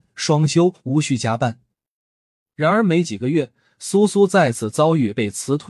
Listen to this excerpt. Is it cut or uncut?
uncut